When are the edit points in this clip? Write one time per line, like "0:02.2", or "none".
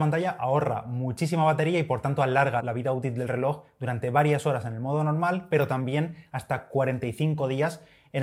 0:02.6